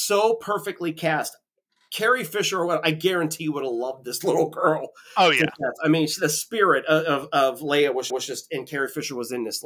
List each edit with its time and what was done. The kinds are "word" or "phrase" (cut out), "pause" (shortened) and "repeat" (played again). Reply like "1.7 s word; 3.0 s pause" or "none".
8.1 s repeat